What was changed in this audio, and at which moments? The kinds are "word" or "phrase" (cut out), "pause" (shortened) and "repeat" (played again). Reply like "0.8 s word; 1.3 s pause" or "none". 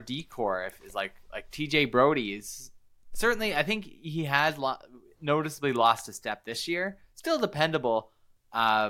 none

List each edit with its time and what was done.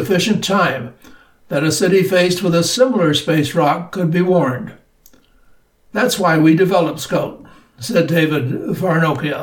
none

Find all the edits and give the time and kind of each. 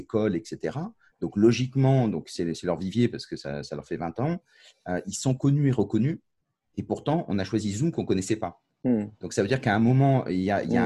none

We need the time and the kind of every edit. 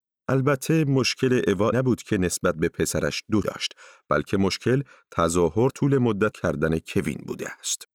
1.7 s word; 3.4 s word; 5.7 s word; 6.3 s word

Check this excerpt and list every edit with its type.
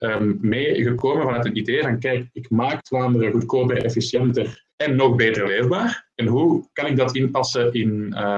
4.7 s pause; 6.1 s pause

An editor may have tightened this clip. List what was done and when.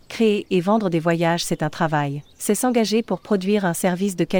2.3 s pause

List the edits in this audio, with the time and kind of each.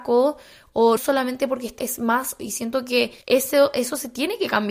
1.0 s word; 1.8 s word; 2.4 s phrase; 3.2 s pause

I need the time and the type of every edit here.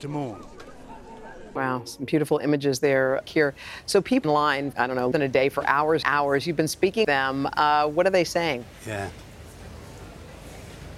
3.2 s word; 4.2 s phrase; 4.7 s word; 5.1 s word; 6.0 s word; 7.0 s word

